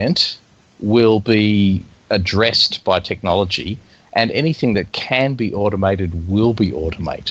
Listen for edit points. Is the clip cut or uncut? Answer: uncut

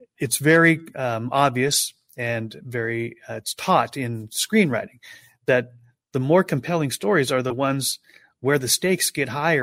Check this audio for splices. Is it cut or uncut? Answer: uncut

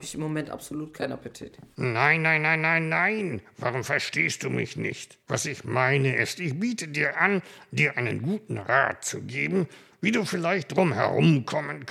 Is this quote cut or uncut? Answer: cut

